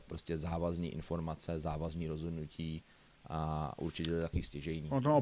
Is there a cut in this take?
no; 0 cuts

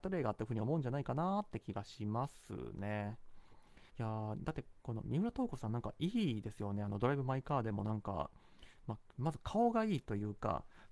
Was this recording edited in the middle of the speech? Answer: yes; 1 cut; at 3.9 s

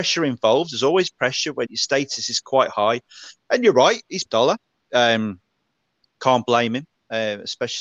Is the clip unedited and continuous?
no; 2 cuts; at 1.6 s, 4.2 s

